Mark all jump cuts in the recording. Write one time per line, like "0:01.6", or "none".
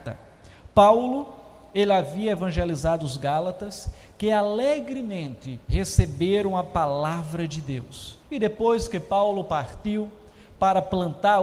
0:05.6
0:08.2